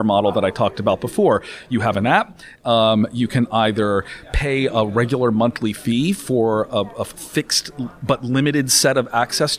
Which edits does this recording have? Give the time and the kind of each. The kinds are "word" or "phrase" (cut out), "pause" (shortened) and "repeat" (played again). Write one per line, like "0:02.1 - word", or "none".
none